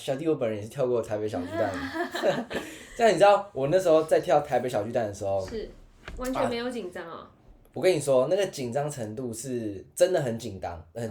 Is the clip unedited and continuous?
yes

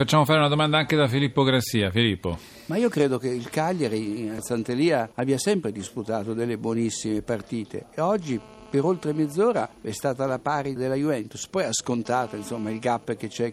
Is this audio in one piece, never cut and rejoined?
no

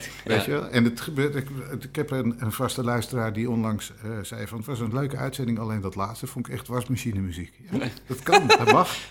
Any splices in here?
no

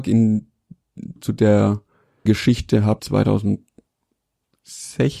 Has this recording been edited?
yes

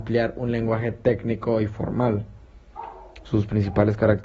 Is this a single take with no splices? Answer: yes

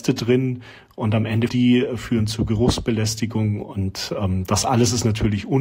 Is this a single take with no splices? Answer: no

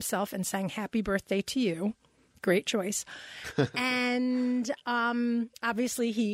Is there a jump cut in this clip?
no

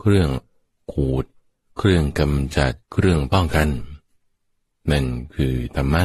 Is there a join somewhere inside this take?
yes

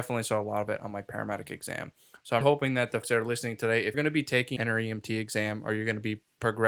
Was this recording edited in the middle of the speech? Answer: yes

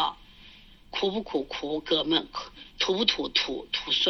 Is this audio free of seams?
yes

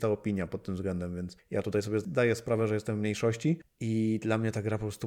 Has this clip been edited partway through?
no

